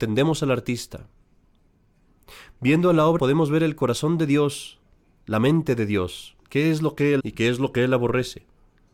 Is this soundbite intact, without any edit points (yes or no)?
no